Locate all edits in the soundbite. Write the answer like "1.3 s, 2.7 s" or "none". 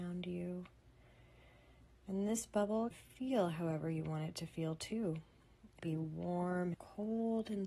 2.9 s, 5.8 s, 6.7 s